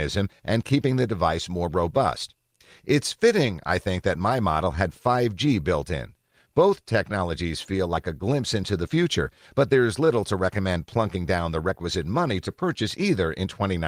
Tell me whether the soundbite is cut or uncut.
uncut